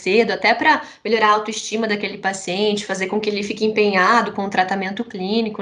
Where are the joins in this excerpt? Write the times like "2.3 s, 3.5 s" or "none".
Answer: none